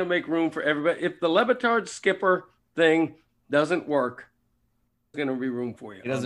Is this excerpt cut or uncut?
cut